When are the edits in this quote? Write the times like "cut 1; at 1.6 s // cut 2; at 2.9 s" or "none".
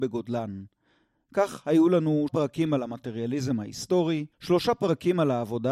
cut 1; at 2.3 s // cut 2; at 4.3 s